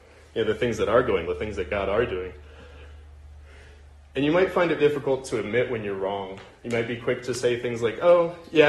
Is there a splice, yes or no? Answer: yes